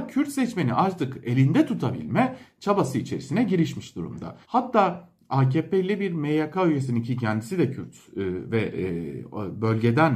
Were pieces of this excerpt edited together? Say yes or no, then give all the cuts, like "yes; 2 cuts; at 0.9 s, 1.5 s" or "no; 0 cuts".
yes; 1 cut; at 4.4 s